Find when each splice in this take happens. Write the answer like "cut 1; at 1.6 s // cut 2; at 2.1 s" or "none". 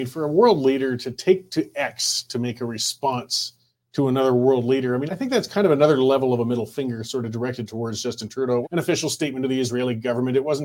cut 1; at 5.1 s // cut 2; at 8.6 s